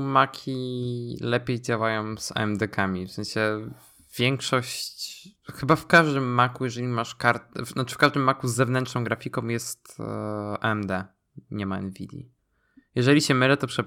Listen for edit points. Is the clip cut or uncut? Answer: uncut